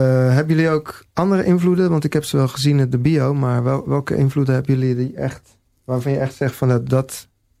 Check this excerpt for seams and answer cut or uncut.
cut